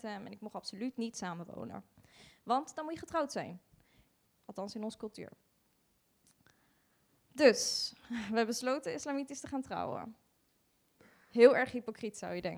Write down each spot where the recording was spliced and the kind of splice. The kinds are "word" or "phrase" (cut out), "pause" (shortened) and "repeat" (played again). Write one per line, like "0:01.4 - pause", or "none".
none